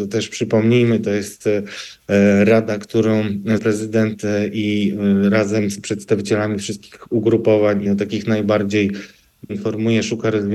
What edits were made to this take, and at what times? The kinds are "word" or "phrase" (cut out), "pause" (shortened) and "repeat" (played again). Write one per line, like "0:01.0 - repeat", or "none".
0:03.6 - word
0:07.9 - word
0:09.5 - word